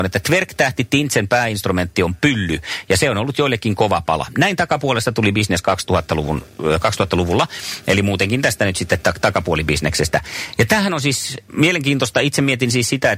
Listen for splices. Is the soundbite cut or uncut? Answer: uncut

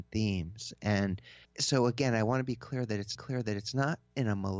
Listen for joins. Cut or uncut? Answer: cut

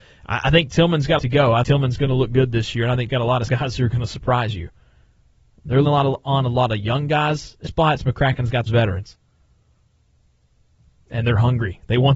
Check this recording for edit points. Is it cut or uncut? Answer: cut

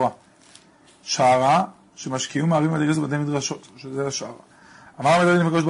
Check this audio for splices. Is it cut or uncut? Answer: uncut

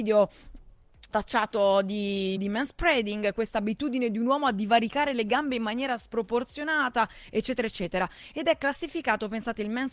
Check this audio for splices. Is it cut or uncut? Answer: cut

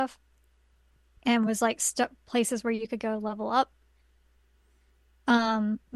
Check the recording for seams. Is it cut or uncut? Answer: uncut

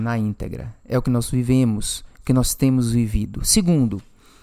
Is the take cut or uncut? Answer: uncut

